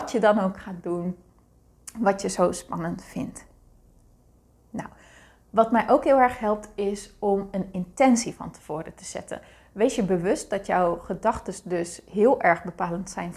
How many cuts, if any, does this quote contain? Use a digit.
0